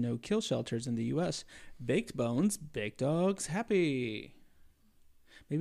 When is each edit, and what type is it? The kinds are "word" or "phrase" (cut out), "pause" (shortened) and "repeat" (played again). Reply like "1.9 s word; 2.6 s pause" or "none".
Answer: none